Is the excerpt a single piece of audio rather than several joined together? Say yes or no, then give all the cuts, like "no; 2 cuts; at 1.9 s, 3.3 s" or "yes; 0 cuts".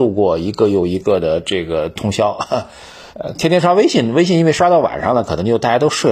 no; 1 cut; at 3.1 s